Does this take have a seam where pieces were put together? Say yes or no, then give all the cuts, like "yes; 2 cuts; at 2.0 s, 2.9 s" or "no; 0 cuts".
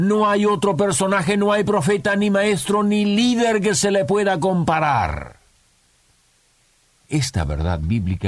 no; 0 cuts